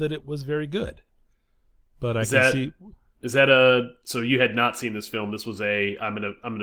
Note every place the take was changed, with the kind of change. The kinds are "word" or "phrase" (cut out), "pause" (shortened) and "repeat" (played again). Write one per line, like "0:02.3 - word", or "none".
none